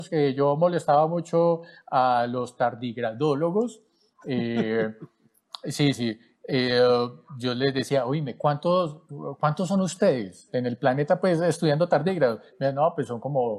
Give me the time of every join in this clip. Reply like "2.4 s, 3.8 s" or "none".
5.9 s